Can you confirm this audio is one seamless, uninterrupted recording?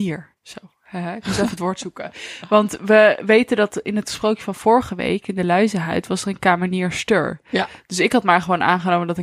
yes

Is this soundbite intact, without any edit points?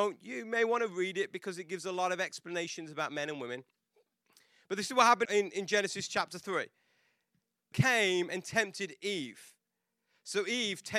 no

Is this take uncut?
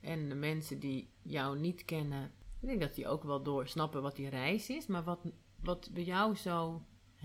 yes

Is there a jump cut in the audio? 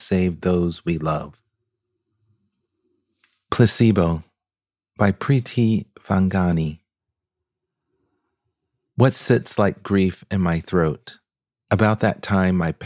no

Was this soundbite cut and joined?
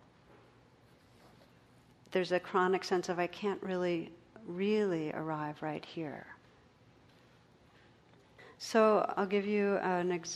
no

